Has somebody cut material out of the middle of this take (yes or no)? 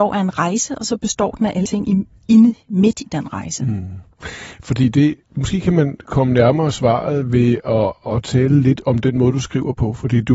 yes